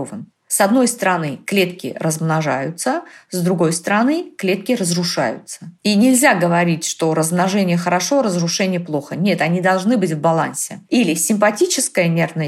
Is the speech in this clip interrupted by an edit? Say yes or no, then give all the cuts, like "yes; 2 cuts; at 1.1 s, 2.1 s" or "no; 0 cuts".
yes; 1 cut; at 5.7 s